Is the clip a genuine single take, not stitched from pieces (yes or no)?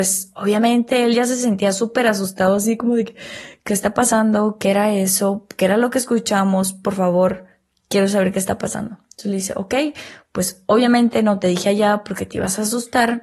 yes